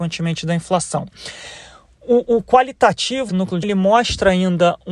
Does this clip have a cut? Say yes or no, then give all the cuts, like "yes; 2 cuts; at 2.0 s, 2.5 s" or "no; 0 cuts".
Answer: yes; 2 cuts; at 3.3 s, 3.6 s